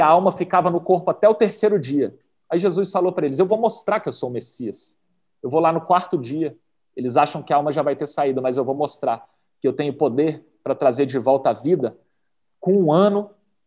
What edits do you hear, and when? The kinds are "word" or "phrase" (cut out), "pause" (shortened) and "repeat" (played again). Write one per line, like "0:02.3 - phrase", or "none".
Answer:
none